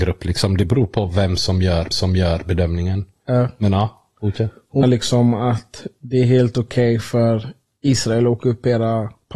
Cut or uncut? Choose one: cut